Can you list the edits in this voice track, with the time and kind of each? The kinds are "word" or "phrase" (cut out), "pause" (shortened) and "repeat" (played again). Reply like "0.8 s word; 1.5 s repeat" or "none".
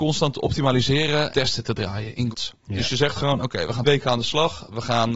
1.3 s word; 2.3 s word; 3.8 s word

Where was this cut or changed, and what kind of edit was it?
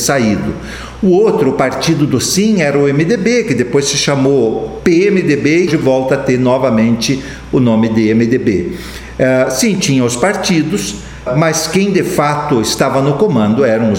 5.7 s phrase; 11.3 s word

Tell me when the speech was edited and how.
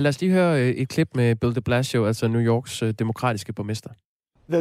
none

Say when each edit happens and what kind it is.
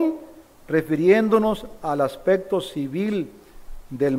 none

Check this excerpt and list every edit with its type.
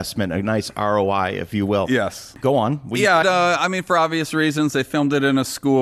3.2 s word

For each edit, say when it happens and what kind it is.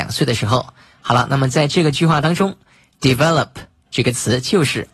none

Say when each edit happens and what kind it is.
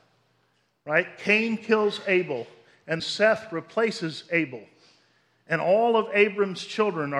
3.0 s word

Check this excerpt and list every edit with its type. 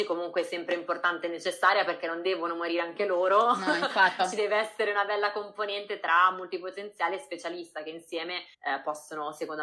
4.2 s word; 8.5 s pause

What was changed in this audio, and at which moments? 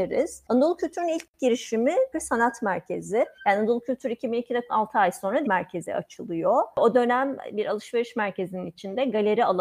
2.1 s word; 3.4 s pause; 4.7 s word; 5.4 s phrase

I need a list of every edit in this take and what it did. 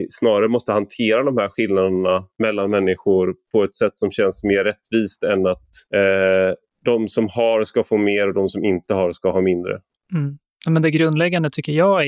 2.3 s pause; 5.8 s pause; 9.9 s pause

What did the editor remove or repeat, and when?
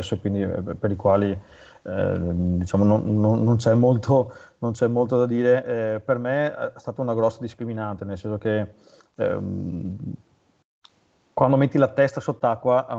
none

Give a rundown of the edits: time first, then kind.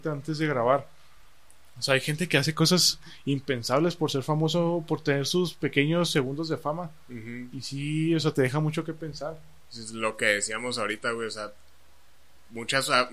none

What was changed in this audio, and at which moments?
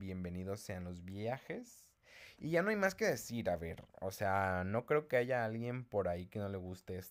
none

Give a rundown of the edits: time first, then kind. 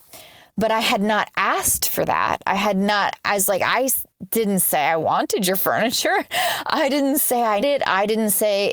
7.6 s word

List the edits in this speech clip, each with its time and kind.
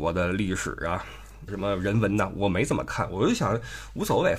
1.5 s word

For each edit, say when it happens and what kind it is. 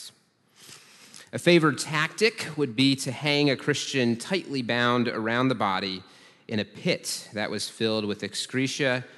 none

